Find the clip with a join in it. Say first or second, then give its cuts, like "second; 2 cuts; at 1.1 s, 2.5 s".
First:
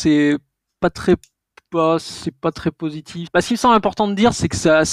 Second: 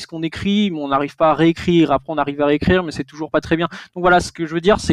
first; 1 cut; at 3.3 s